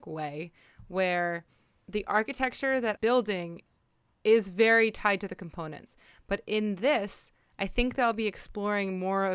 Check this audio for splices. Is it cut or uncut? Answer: cut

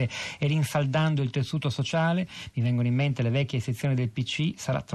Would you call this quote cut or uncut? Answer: uncut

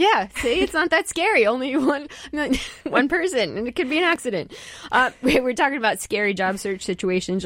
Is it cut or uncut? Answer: uncut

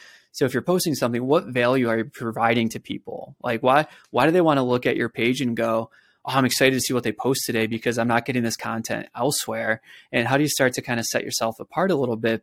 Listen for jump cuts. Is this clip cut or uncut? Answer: uncut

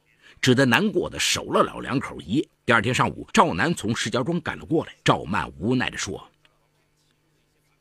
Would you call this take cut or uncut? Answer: cut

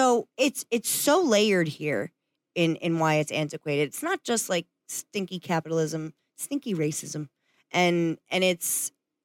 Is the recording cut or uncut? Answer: uncut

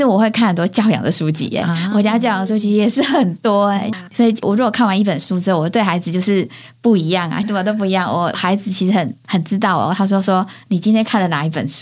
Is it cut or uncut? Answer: cut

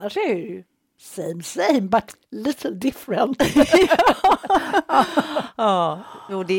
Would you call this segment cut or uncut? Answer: uncut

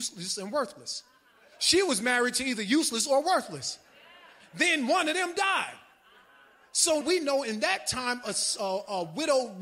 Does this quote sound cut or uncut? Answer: cut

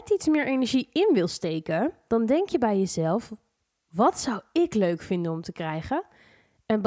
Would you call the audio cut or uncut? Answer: uncut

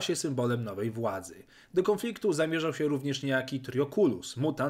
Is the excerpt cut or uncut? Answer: uncut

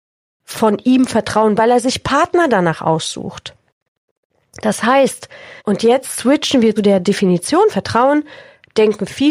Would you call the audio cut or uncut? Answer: cut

